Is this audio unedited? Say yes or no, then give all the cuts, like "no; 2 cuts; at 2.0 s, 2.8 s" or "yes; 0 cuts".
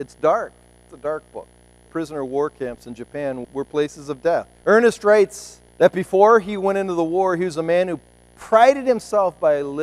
no; 4 cuts; at 1.9 s, 3.4 s, 4.6 s, 5.7 s